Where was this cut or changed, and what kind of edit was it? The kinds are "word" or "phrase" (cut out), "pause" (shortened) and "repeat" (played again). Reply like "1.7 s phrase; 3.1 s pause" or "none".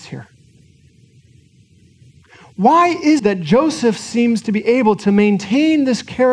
3.2 s word